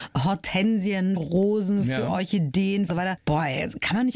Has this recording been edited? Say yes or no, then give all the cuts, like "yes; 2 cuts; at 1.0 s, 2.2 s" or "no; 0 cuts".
yes; 2 cuts; at 1.2 s, 2.9 s